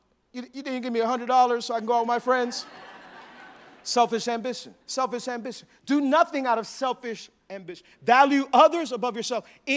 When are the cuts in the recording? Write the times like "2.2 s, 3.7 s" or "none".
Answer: 4.8 s